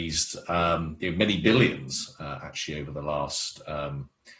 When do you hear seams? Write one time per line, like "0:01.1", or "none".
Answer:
none